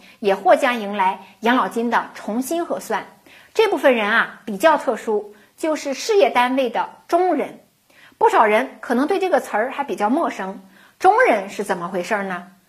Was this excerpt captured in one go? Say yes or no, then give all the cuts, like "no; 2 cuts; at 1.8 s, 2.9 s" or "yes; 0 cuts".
yes; 0 cuts